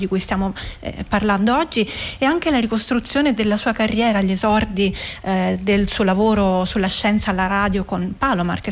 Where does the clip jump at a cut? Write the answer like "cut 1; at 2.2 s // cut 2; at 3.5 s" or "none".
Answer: none